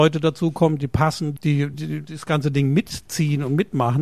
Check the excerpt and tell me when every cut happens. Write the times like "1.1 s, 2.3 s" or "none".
1.4 s, 1.7 s

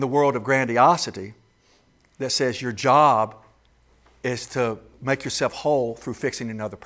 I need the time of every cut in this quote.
none

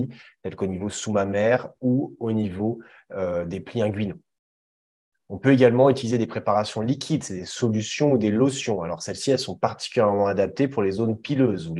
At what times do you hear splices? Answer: none

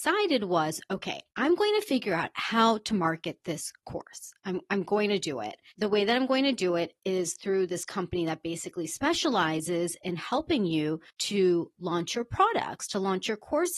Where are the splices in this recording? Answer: 11.1 s

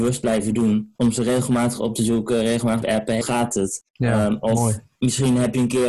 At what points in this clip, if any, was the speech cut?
1.0 s, 2.8 s, 3.2 s, 3.9 s

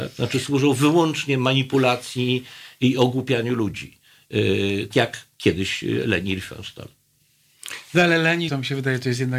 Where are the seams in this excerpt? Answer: 4.9 s, 8.5 s

